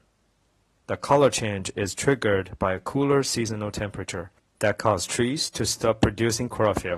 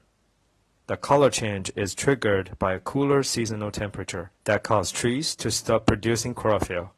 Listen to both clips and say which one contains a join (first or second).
second